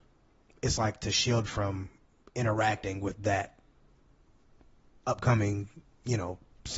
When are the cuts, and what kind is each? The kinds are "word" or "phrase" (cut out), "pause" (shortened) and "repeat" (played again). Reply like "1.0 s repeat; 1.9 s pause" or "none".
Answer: 1.5 s word; 5.0 s word